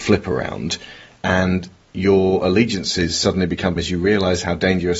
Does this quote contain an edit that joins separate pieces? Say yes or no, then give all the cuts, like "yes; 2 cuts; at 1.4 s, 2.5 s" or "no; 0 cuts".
yes; 1 cut; at 3.8 s